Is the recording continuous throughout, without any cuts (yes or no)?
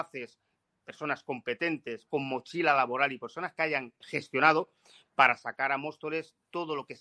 no